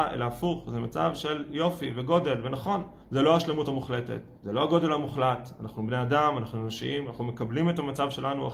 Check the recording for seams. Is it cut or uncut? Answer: cut